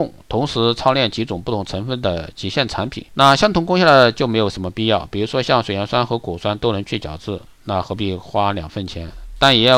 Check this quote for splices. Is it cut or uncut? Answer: cut